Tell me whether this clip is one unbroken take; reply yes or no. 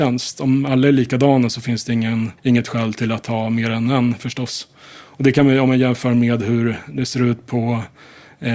no